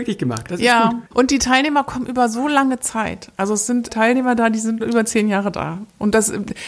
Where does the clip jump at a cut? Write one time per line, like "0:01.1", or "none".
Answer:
0:01.1
0:03.9
0:04.8

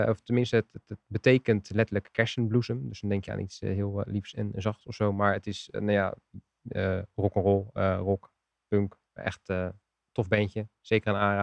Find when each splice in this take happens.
0:09.1

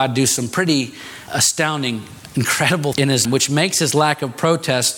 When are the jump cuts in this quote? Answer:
0:01.3
0:02.9
0:03.3

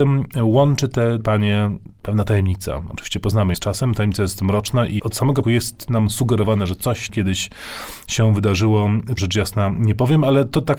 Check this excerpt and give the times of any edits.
0:01.2
0:03.5
0:05.0
0:05.4
0:07.1
0:09.2

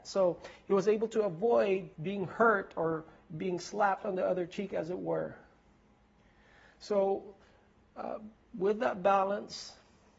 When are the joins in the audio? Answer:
0:01.9

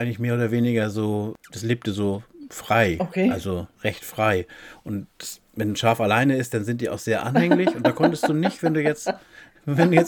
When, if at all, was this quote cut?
0:03.7

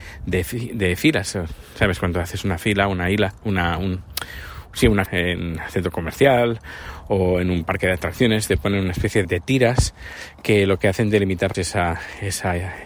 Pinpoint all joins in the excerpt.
0:05.1
0:09.2
0:11.5

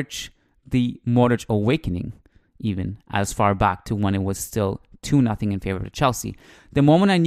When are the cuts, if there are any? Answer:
none

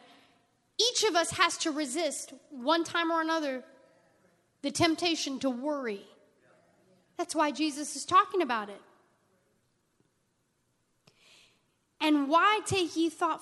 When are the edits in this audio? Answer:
none

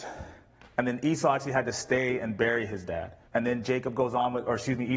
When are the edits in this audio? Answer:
0:03.3

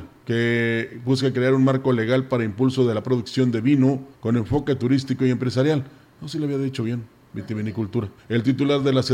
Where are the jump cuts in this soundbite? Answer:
0:04.1
0:08.2

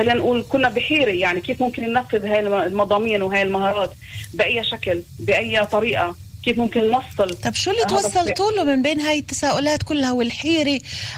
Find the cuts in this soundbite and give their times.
none

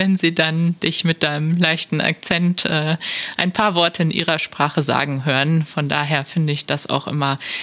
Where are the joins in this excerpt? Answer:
none

